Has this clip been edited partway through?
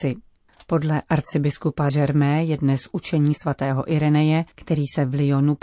yes; 2 cuts; at 1.9 s, 4.5 s

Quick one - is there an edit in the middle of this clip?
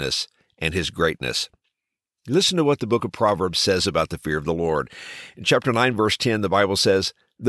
no; 0 cuts

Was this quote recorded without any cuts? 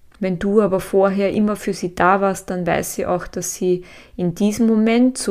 yes; 0 cuts

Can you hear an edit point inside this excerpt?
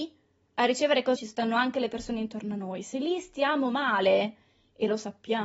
yes; 1 cut; at 1.2 s

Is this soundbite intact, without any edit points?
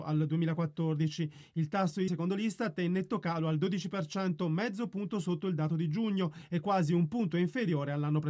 no; 1 cut; at 2.1 s

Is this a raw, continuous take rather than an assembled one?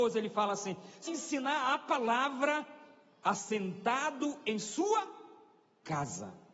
no; 1 cut; at 1.1 s

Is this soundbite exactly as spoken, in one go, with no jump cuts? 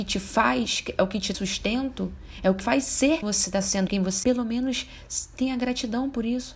no; 5 cuts; at 1.3 s, 2.6 s, 3.2 s, 3.9 s, 4.2 s

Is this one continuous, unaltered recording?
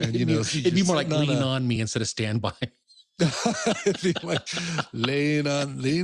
yes; 0 cuts

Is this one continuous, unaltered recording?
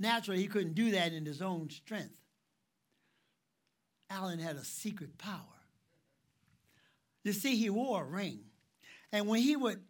yes; 0 cuts

